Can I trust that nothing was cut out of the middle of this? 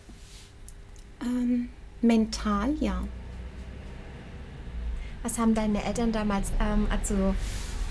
no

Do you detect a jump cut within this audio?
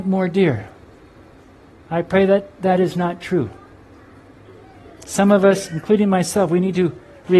no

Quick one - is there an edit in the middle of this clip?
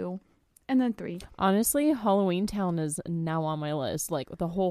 no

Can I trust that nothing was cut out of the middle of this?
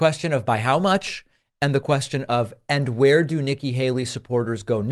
yes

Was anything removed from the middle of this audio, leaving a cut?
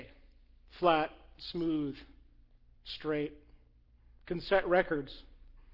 no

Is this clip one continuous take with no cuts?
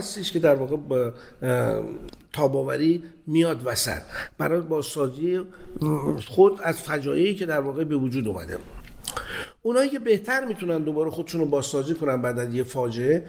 yes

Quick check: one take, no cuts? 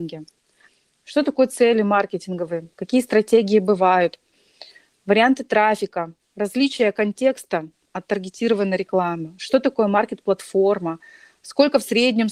yes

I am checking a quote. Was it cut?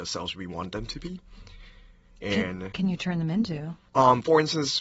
yes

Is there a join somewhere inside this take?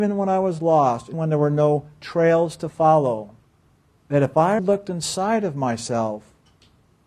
yes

